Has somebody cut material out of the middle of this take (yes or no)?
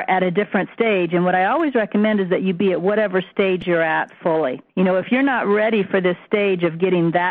yes